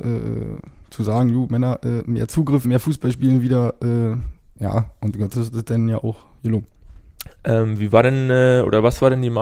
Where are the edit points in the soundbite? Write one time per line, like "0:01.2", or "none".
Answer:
0:02.6
0:05.3